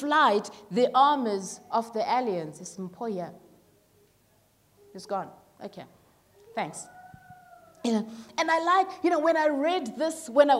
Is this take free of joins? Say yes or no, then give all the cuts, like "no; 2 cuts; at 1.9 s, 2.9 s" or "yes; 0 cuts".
yes; 0 cuts